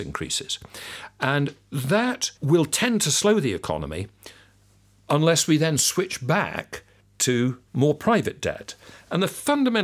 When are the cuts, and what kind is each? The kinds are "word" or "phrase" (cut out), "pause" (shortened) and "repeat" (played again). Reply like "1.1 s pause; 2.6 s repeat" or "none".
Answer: 2.4 s pause; 7.7 s pause